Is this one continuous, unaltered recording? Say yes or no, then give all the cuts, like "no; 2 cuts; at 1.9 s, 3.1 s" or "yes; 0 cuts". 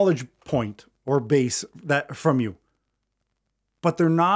yes; 0 cuts